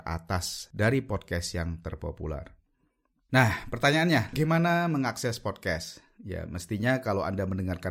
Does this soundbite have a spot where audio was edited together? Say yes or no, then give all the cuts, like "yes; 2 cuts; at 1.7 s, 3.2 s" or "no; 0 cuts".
yes; 1 cut; at 4.3 s